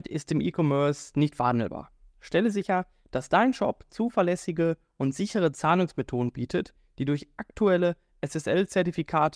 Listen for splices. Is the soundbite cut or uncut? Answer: uncut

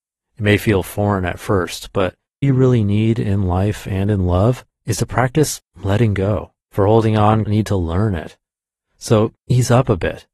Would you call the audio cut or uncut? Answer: cut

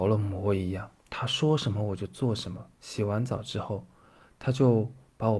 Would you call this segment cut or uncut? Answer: cut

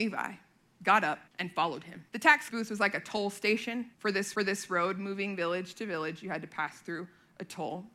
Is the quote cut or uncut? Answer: cut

